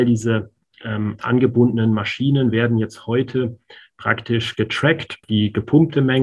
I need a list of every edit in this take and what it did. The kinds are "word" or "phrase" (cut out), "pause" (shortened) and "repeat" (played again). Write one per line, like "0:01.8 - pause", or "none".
0:05.2 - word